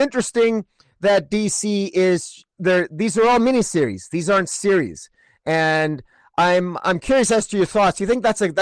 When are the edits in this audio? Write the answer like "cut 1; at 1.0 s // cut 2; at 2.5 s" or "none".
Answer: none